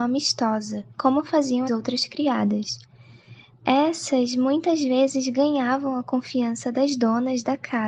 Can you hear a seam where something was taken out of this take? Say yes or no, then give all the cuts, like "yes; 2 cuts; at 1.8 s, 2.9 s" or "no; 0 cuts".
yes; 2 cuts; at 0.9 s, 1.7 s